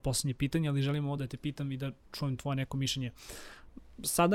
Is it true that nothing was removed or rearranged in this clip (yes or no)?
yes